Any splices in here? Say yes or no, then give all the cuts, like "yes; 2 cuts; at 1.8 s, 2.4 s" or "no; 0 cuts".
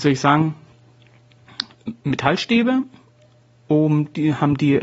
yes; 1 cut; at 2.0 s